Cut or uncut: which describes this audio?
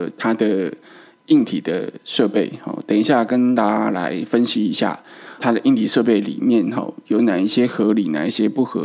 cut